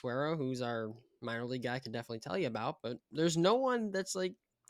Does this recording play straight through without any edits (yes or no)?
yes